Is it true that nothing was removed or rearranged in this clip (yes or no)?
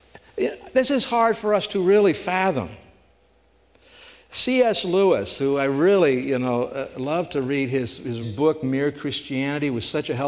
no